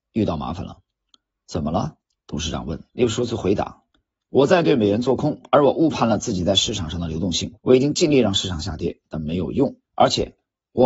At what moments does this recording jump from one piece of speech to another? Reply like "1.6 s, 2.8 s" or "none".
2.0 s, 2.9 s, 7.6 s, 9.8 s

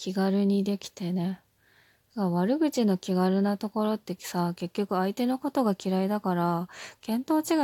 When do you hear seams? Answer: none

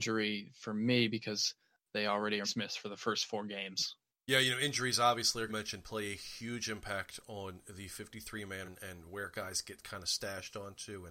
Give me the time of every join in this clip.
2.4 s, 4.1 s, 5.5 s, 8.6 s

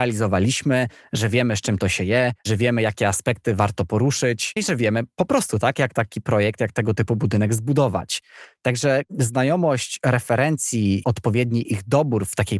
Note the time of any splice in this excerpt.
2.4 s, 4.6 s, 11.0 s

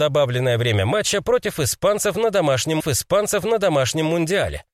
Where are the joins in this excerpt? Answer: 2.8 s

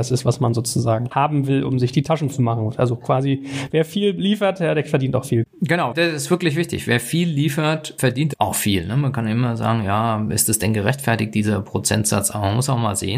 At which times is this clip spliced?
2.3 s

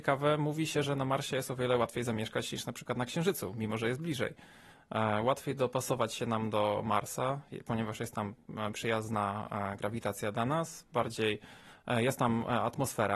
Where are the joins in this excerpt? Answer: 8.7 s

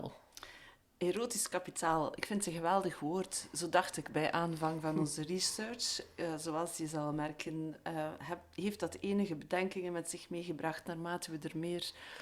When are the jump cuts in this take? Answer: none

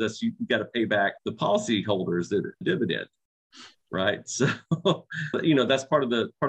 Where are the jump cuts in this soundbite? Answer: 1.2 s, 2.6 s, 5.3 s

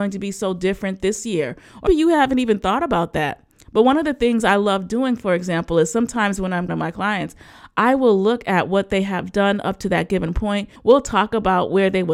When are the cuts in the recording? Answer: 1.9 s, 6.7 s, 10.8 s

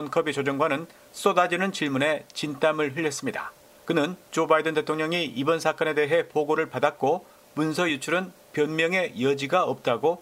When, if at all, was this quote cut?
none

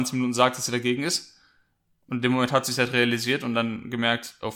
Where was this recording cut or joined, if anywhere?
none

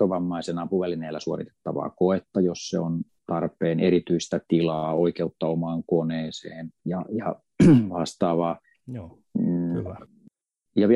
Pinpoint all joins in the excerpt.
6.8 s, 8.6 s

